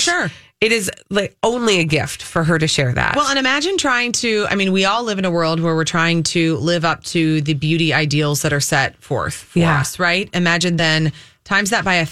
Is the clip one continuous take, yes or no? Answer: yes